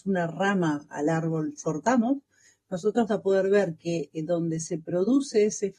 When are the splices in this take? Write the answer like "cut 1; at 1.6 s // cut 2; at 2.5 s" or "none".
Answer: cut 1; at 1.6 s // cut 2; at 3.1 s